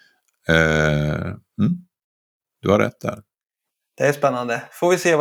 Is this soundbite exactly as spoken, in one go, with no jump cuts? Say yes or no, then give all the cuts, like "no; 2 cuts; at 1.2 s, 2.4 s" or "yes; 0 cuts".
yes; 0 cuts